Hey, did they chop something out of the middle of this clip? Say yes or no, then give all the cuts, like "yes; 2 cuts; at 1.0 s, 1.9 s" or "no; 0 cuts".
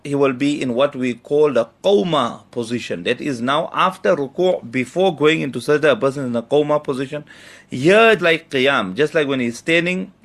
yes; 1 cut; at 8.2 s